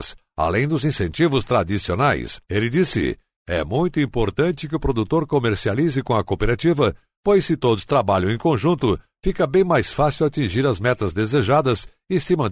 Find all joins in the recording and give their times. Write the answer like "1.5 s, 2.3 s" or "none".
none